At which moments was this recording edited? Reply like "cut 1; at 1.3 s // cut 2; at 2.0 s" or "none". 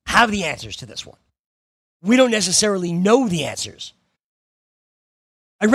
none